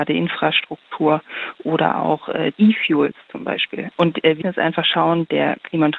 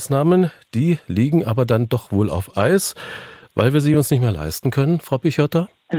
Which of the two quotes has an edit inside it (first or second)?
first